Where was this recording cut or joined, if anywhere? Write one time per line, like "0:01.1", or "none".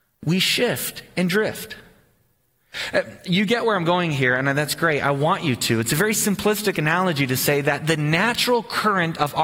none